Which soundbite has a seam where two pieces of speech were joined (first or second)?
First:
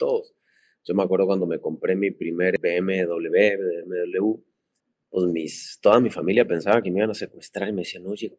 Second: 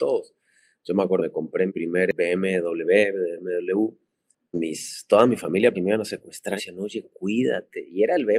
second